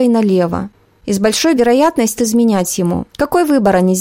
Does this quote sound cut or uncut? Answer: cut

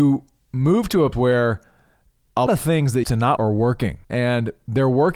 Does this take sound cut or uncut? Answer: cut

